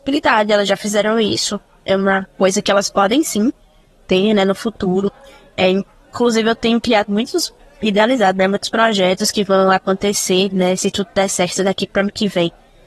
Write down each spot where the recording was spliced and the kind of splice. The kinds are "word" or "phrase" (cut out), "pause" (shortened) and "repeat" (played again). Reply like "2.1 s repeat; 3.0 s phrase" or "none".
none